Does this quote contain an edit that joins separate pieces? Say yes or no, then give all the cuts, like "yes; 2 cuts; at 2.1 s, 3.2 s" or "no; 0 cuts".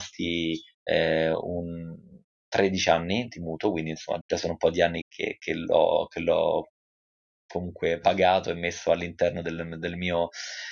yes; 3 cuts; at 3.3 s, 4.2 s, 5.0 s